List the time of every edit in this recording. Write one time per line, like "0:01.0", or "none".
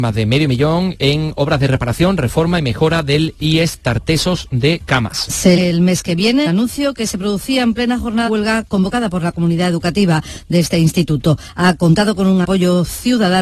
0:05.6
0:06.5
0:08.3
0:12.4